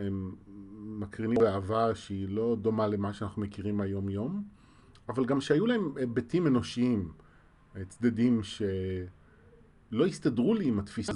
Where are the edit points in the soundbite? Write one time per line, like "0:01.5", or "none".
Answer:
none